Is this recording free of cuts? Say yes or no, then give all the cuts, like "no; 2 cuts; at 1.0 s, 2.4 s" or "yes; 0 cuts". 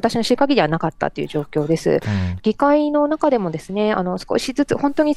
no; 1 cut; at 2.4 s